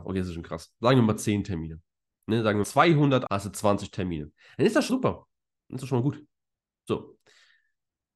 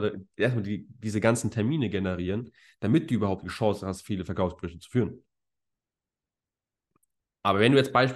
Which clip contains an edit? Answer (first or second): first